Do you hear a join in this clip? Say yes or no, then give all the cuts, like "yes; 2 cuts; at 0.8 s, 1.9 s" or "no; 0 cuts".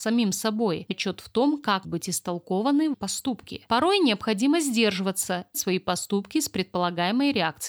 yes; 4 cuts; at 0.9 s, 1.8 s, 2.9 s, 5.5 s